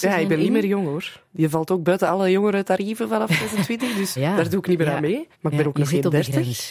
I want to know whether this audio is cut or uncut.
cut